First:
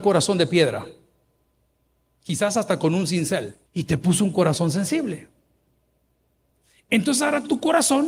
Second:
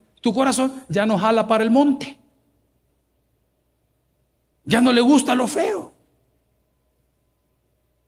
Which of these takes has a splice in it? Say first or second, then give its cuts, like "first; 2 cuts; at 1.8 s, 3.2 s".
first; 1 cut; at 3.7 s